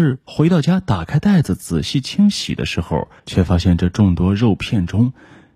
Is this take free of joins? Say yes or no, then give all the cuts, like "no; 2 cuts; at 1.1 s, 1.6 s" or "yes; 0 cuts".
no; 1 cut; at 3.2 s